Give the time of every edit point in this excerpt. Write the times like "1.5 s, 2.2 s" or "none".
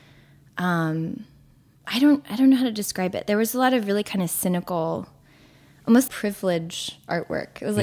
6.1 s